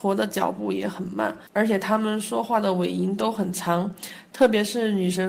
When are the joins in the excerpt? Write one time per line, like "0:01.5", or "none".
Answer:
0:01.5